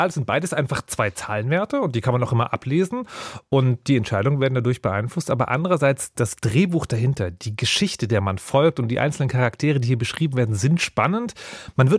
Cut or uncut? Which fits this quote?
uncut